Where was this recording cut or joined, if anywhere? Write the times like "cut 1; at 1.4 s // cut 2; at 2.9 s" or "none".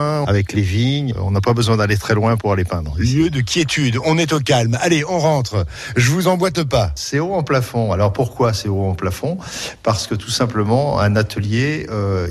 none